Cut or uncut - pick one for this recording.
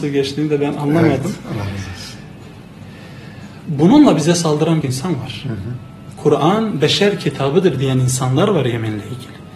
cut